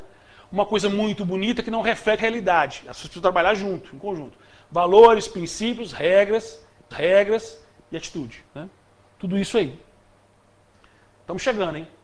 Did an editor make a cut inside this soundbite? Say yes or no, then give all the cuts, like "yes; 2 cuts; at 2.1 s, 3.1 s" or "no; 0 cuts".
yes; 2 cuts; at 2.2 s, 6.9 s